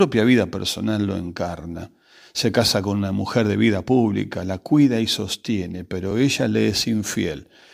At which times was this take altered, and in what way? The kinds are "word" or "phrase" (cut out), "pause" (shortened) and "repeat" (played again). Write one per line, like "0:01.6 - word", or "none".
none

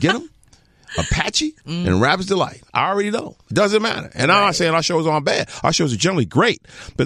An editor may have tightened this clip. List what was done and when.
0:01.6 - pause

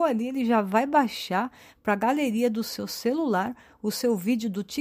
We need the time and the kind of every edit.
none

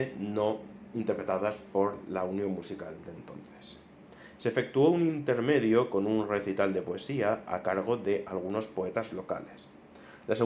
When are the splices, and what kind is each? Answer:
none

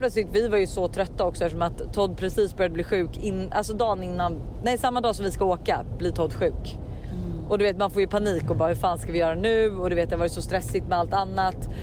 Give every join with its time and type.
none

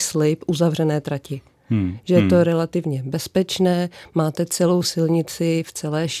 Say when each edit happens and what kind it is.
none

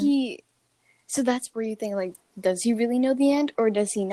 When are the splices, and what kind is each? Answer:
0:01.5 - word

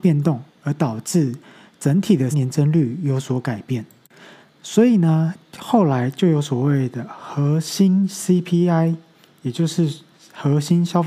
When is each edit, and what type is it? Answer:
0:02.3 - word

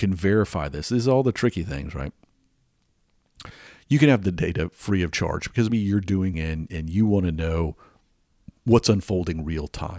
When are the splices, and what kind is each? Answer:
0:05.7 - word
0:06.3 - word

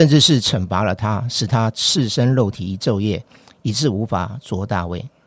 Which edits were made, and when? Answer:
none

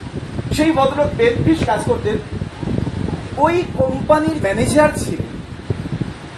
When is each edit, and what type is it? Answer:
0:01.1 - word
0:01.7 - word
0:03.4 - word
0:04.4 - word

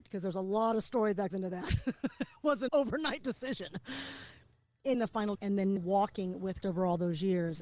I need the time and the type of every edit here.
0:01.3 - word
0:02.7 - word
0:04.9 - word
0:05.3 - word
0:05.8 - word
0:06.6 - word

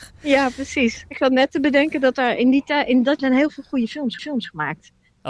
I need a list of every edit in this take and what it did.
0:03.2 - word
0:04.2 - repeat

